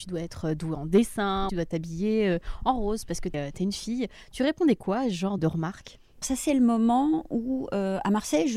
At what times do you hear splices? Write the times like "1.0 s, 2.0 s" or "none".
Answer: 1.5 s, 3.3 s, 5.4 s, 6.2 s

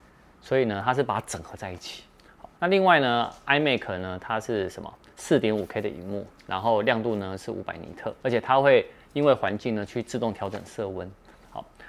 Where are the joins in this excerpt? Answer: 2.5 s, 8.2 s

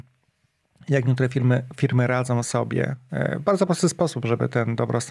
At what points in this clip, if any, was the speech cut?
none

